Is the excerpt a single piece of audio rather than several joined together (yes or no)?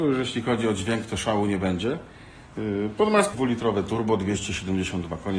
no